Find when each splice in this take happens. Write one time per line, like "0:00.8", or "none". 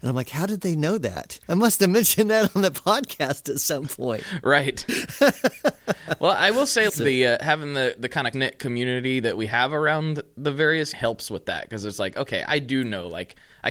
0:01.4
0:06.9
0:08.3
0:10.9